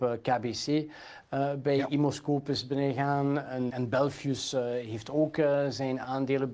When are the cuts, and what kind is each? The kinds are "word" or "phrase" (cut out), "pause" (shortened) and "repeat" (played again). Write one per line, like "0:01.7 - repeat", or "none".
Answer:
0:03.7 - word